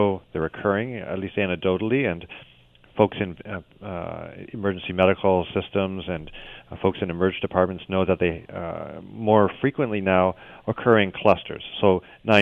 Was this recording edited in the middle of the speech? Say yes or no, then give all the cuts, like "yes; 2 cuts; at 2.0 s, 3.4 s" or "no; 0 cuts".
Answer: no; 0 cuts